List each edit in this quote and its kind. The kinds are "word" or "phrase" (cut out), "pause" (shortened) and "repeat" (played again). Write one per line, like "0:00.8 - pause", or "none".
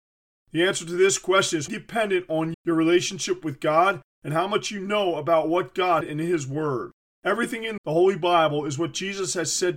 0:01.7 - word
0:02.5 - word
0:06.0 - phrase
0:07.1 - pause
0:07.8 - phrase